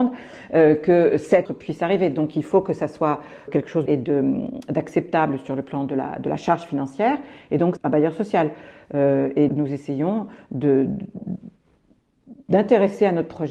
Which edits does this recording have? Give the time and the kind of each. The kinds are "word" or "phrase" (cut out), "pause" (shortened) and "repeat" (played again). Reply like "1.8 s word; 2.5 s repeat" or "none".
1.5 s word; 3.5 s word; 3.9 s phrase; 7.8 s phrase; 9.5 s word

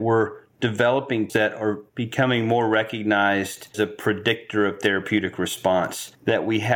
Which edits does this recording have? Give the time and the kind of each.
1.3 s word; 3.7 s word

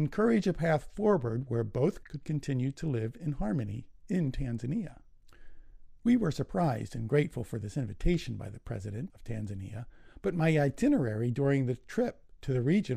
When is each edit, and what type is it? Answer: 2.0 s word

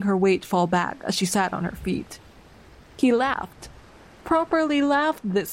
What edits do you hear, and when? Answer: none

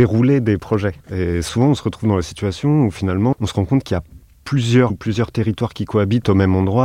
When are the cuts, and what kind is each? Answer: 1.0 s pause; 3.3 s word; 4.9 s word

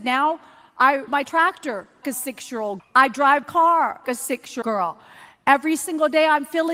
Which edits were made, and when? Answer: 1.1 s word; 2.0 s word; 2.8 s word; 3.4 s word; 4.0 s word; 4.6 s word

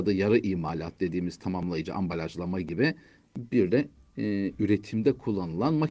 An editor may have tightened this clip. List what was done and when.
none

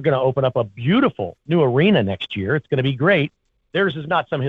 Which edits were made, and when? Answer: 1.4 s pause

